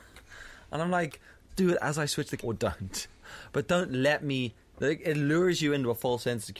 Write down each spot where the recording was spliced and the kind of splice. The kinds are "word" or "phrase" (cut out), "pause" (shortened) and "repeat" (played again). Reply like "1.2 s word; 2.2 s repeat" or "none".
1.5 s word; 2.4 s phrase